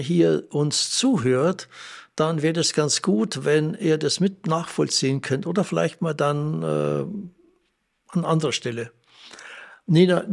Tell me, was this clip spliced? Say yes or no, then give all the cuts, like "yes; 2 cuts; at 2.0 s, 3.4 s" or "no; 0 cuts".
no; 0 cuts